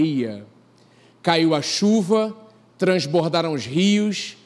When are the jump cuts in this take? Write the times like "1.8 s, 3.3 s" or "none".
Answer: none